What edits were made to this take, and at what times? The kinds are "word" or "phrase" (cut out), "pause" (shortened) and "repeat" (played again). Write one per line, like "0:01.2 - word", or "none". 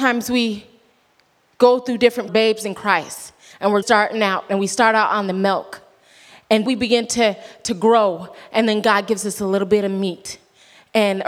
0:02.3 - phrase
0:03.8 - word
0:06.7 - word